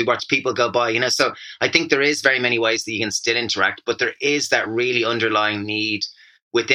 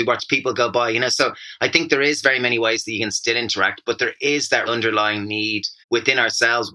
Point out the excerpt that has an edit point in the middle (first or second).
second